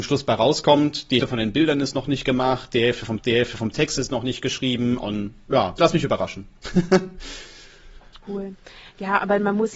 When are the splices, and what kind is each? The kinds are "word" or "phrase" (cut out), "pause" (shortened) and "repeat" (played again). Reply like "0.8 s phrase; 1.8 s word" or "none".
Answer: 1.2 s word; 3.2 s repeat; 5.8 s word; 8.2 s pause